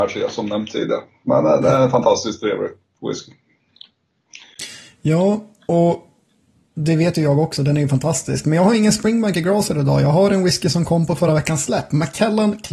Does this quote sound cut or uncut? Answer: uncut